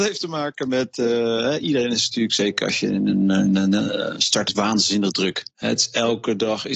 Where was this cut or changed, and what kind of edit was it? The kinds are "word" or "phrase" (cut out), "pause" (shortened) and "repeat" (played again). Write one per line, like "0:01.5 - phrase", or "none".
0:04.5 - phrase
0:05.5 - pause